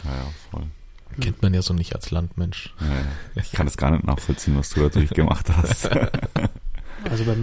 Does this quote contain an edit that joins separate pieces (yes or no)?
no